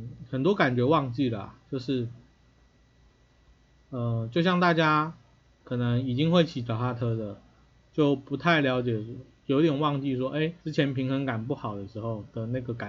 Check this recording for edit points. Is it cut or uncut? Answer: cut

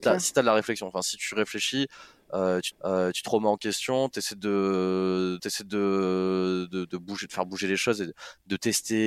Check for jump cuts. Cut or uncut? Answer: cut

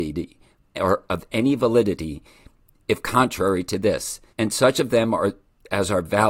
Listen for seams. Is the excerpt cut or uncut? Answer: cut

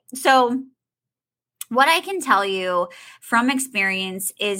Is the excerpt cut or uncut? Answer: uncut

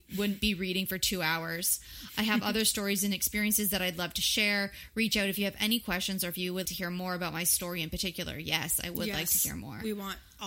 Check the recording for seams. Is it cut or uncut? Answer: cut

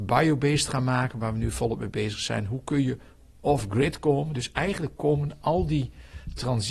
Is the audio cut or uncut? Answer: uncut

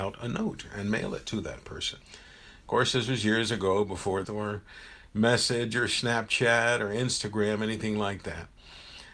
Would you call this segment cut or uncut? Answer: cut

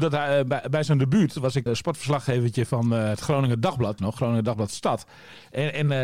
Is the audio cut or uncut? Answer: cut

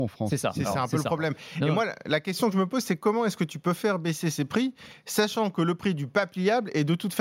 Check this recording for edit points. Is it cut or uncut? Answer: uncut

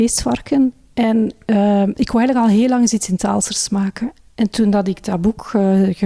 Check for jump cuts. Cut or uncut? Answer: uncut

